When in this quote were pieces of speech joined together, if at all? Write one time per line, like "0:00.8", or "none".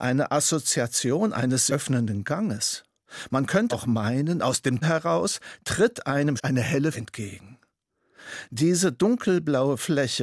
0:01.7
0:03.7
0:04.8
0:06.4
0:06.9